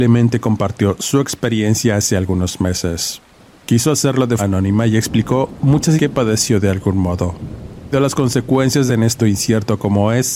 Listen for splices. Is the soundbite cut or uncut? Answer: cut